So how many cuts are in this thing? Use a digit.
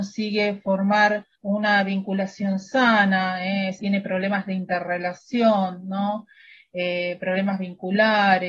2